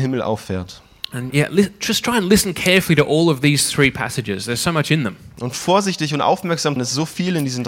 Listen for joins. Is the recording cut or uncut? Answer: cut